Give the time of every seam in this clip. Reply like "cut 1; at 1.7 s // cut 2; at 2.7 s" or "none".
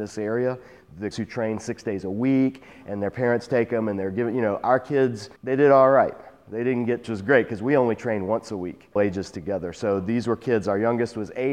cut 1; at 1.1 s // cut 2; at 5.4 s // cut 3; at 7.0 s // cut 4; at 9.0 s

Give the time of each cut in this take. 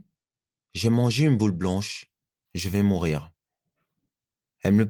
cut 1; at 2.5 s

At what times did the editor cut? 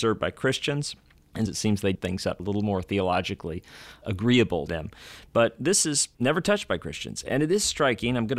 cut 1; at 1.5 s // cut 2; at 1.9 s // cut 3; at 2.4 s // cut 4; at 4.7 s // cut 5; at 6.1 s

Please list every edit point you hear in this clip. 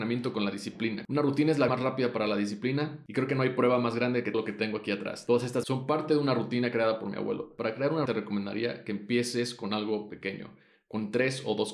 cut 1; at 1.7 s // cut 2; at 4.3 s // cut 3; at 5.6 s // cut 4; at 8.1 s

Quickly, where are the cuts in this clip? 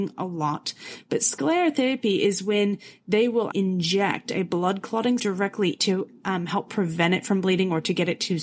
cut 1; at 3.5 s // cut 2; at 5.2 s // cut 3; at 5.8 s

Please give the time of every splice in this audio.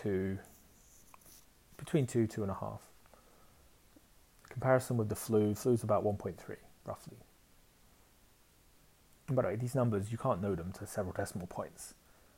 none

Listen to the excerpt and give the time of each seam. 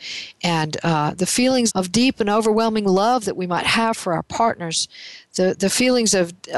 cut 1; at 1.7 s

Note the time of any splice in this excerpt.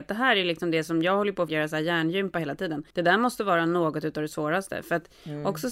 cut 1; at 1.5 s // cut 2; at 2.9 s

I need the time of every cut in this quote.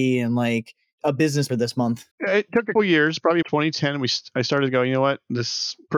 cut 1; at 1.5 s // cut 2; at 2.1 s // cut 3; at 2.8 s // cut 4; at 3.4 s

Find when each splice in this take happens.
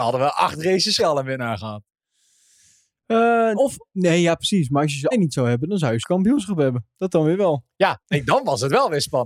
cut 1; at 1.0 s // cut 2; at 3.5 s // cut 3; at 5.1 s // cut 4; at 6.0 s

